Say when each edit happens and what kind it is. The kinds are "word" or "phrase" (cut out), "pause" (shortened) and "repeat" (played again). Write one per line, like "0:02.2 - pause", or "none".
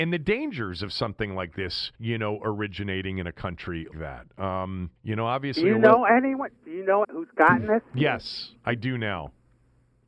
0:01.9 - pause
0:03.9 - word
0:05.0 - pause
0:06.6 - pause
0:07.0 - phrase